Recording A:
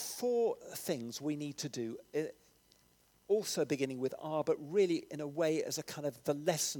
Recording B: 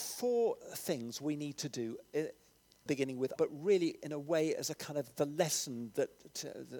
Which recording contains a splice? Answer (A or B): B